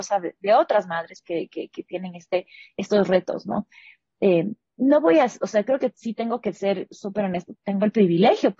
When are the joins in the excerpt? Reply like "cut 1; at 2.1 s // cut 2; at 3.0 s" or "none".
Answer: cut 1; at 1.2 s // cut 2; at 7.5 s